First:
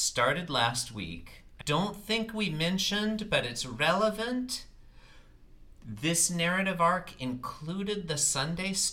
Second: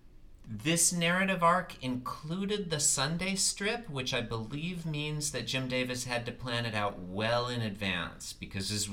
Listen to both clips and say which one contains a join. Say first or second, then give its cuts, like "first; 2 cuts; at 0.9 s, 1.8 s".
first; 1 cut; at 1.6 s